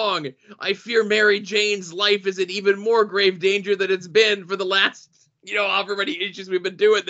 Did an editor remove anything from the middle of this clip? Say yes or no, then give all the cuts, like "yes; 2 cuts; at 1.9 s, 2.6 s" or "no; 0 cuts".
no; 0 cuts